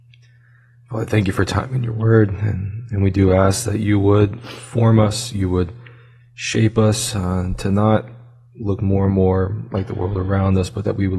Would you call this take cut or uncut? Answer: uncut